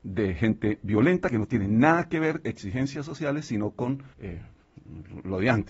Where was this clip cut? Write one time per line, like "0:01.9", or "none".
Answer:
0:02.4
0:04.1